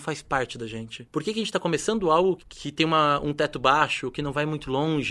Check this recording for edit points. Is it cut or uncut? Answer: cut